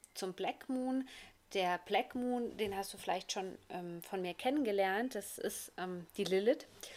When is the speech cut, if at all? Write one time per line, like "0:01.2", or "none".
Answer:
none